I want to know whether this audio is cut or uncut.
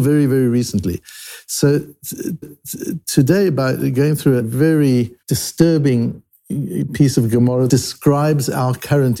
cut